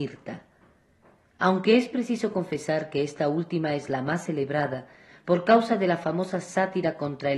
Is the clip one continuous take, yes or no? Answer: yes